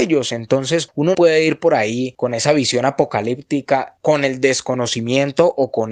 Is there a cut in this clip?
yes; 1 cut; at 1.1 s

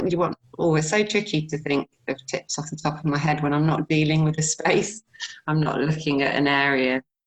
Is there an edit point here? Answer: no; 0 cuts

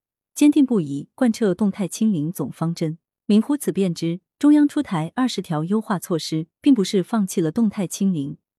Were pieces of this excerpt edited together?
no; 0 cuts

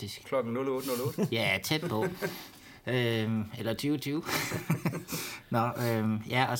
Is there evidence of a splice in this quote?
no; 0 cuts

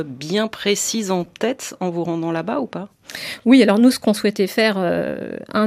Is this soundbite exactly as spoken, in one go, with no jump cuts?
yes; 0 cuts

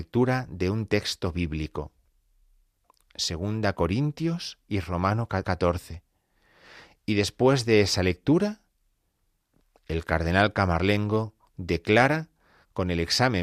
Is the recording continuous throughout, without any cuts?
no; 1 cut; at 5.4 s

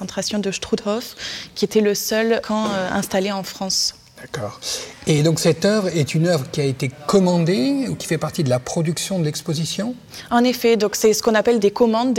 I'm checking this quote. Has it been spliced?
no; 0 cuts

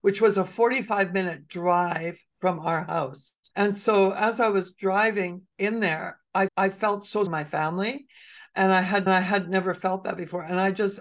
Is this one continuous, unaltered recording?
no; 4 cuts; at 3.5 s, 6.5 s, 7.3 s, 9.1 s

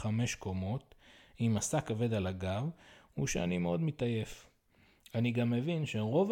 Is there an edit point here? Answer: no; 0 cuts

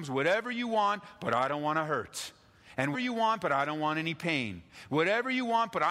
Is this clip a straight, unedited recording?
no; 1 cut; at 2.9 s

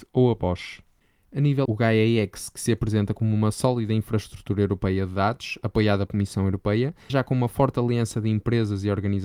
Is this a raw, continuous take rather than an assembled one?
no; 3 cuts; at 1.7 s, 6.1 s, 7.1 s

